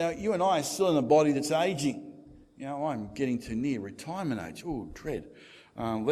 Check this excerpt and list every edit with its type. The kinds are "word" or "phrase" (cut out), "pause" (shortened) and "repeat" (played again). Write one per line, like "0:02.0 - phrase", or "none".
none